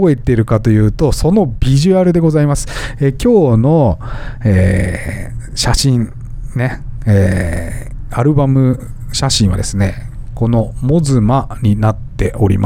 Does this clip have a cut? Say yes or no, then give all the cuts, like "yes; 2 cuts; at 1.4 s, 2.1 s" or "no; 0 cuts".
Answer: no; 0 cuts